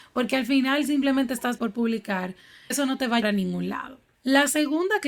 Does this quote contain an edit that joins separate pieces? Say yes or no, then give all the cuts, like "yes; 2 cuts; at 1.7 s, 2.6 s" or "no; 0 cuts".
yes; 3 cuts; at 1.6 s, 2.7 s, 3.2 s